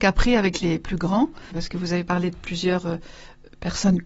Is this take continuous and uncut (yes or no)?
no